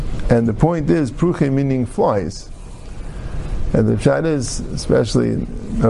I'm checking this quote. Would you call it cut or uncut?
uncut